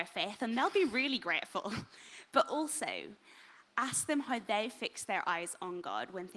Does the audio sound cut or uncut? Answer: uncut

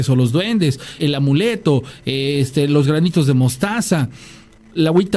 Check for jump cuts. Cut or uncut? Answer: cut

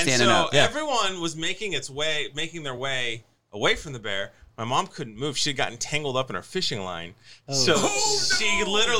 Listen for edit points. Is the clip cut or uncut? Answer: uncut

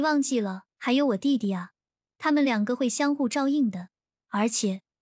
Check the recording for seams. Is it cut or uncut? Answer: uncut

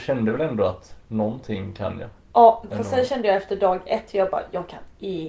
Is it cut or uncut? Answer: uncut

